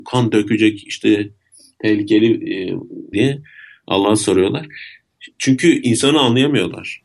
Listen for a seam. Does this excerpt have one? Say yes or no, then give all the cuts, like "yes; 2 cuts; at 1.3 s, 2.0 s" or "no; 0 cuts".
yes; 1 cut; at 3.1 s